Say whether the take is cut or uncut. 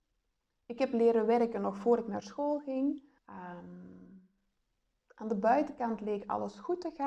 cut